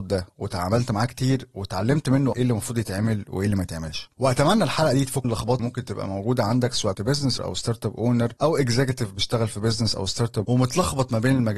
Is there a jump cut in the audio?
yes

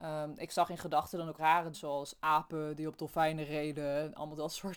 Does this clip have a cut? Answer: yes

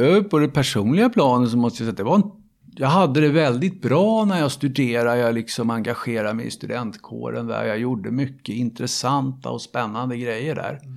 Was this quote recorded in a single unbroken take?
yes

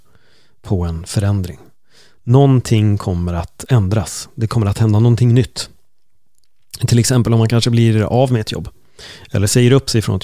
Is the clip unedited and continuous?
yes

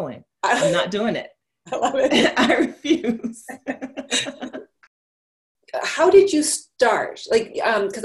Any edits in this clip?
no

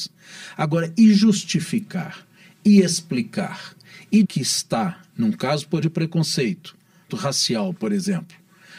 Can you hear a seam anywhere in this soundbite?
yes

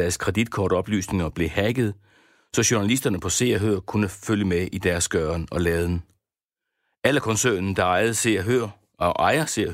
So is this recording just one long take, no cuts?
yes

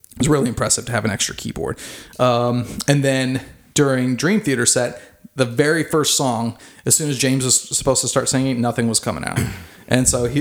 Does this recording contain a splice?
no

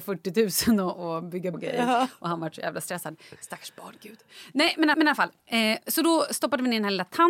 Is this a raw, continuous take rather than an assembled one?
no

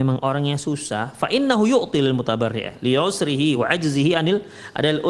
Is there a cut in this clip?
no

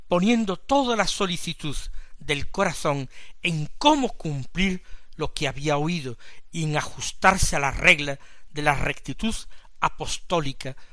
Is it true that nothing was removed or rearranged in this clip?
yes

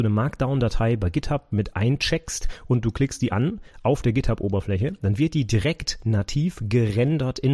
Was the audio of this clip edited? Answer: no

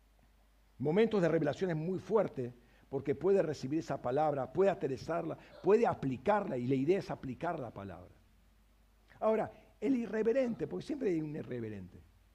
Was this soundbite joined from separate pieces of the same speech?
no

